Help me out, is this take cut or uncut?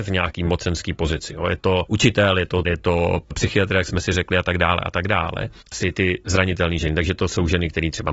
cut